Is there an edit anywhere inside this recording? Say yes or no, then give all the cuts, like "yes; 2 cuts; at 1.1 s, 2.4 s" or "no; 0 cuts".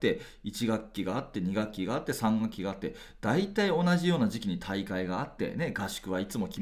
no; 0 cuts